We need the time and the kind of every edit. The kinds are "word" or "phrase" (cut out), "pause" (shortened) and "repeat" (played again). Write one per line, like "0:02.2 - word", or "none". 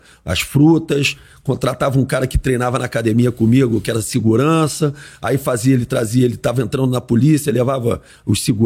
none